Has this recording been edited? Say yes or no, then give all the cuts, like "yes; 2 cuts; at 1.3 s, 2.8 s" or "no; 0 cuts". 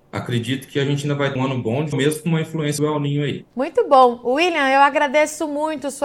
yes; 4 cuts; at 1.4 s, 1.9 s, 2.8 s, 3.5 s